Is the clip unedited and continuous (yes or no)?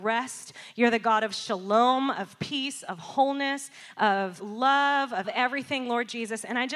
no